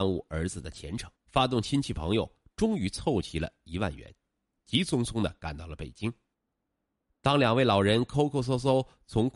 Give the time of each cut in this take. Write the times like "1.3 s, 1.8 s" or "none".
1.2 s